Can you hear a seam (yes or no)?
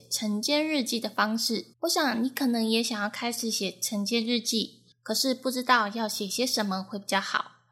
yes